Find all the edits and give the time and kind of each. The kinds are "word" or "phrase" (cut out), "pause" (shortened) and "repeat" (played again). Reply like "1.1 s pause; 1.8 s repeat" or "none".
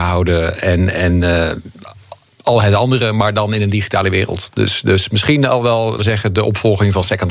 6.0 s word